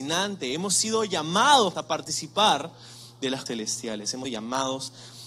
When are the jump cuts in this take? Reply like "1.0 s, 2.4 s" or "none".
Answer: 1.7 s, 3.5 s, 4.2 s